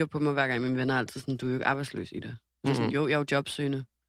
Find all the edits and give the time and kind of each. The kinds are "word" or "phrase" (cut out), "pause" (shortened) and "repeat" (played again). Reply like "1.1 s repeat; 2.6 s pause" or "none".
none

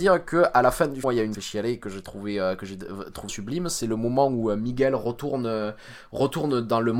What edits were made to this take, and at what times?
1.0 s word; 1.3 s phrase; 3.3 s word

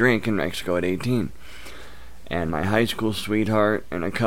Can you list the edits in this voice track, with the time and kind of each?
2.5 s phrase

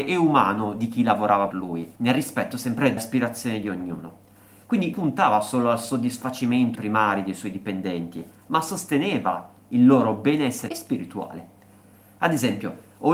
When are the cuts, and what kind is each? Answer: 1.5 s word; 2.0 s pause; 3.0 s word; 4.9 s word; 6.7 s phrase; 10.7 s word

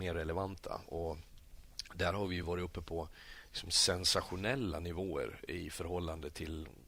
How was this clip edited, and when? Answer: none

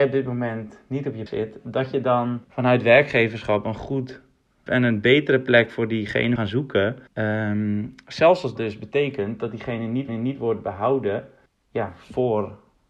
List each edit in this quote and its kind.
1.3 s word; 2.4 s pause; 4.7 s word; 6.4 s word; 7.1 s pause; 8.6 s word; 10.1 s repeat; 11.5 s pause

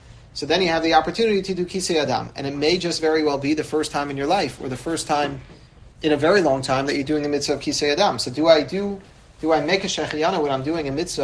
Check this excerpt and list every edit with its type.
5.9 s pause

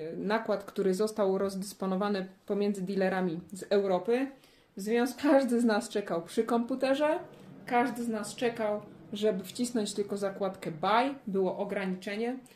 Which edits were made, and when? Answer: 5.2 s phrase

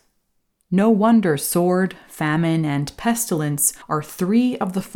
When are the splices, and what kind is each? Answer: 3.8 s pause

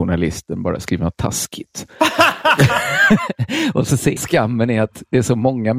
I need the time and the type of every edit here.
4.2 s phrase

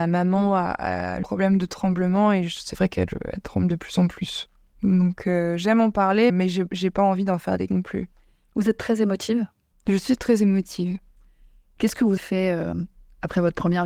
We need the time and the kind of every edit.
1.2 s word; 6.3 s word; 7.7 s word; 12.2 s word

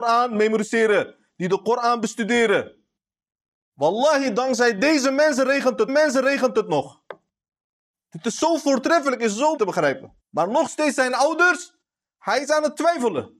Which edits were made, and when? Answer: 5.9 s repeat; 9.6 s phrase; 10.2 s pause

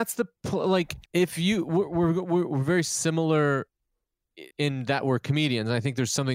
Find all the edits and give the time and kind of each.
1.1 s pause; 4.5 s pause

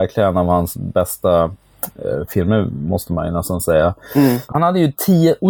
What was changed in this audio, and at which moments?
none

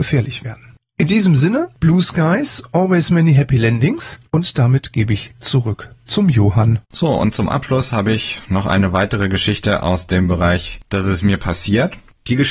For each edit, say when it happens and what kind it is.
6.8 s pause

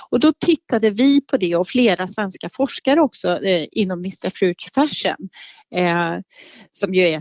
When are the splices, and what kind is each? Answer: none

